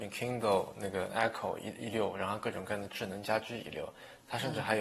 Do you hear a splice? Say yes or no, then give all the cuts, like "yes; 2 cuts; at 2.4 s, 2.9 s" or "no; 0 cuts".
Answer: yes; 1 cut; at 1.1 s